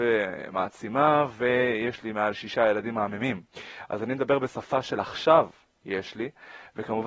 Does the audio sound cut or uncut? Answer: uncut